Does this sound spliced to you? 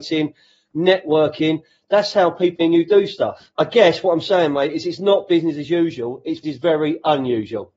yes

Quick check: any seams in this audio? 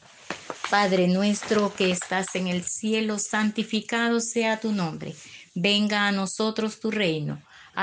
no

